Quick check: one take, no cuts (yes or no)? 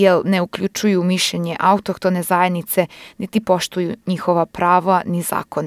yes